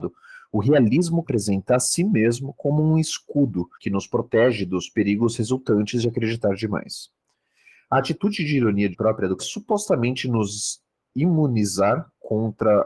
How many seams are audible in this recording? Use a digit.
4